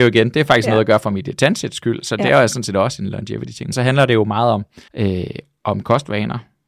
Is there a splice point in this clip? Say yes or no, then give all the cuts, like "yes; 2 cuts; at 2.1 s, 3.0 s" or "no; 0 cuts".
yes; 2 cuts; at 3.7 s, 4.9 s